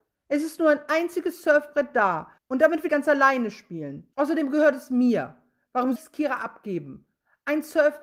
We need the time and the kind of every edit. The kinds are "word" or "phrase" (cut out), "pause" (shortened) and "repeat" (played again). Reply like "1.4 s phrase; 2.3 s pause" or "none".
2.4 s pause; 2.9 s word; 4.1 s pause; 6.0 s word

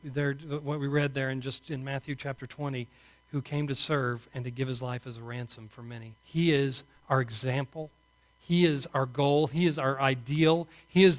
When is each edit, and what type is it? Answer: 6.2 s pause

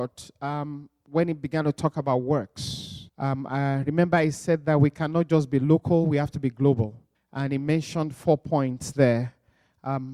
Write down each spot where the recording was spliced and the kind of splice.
3.1 s pause; 7.1 s pause

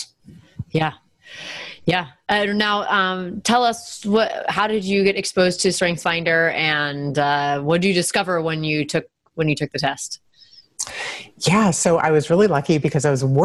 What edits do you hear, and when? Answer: none

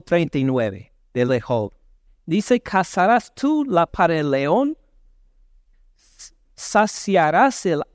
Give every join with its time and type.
1.3 s word; 3.9 s word

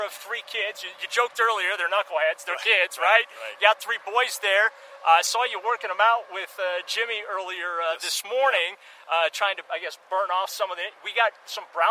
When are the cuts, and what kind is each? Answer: 1.0 s word

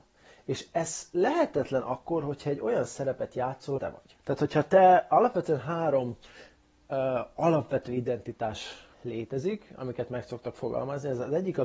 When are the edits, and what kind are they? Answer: 3.8 s phrase; 4.2 s pause; 8.9 s pause

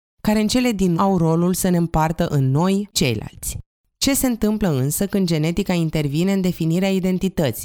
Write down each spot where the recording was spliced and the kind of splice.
0.9 s word; 2.9 s word

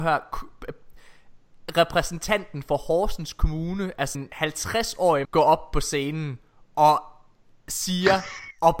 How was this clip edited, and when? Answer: 4.1 s word; 5.2 s word

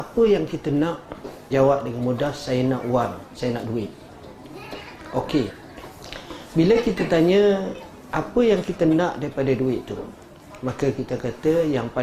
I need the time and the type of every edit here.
1.5 s word

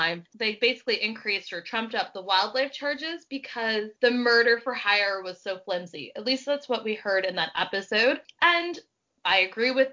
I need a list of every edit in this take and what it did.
4.0 s pause

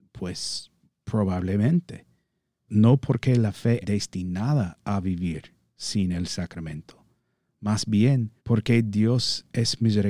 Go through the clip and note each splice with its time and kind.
2.7 s word; 3.8 s word; 8.4 s pause

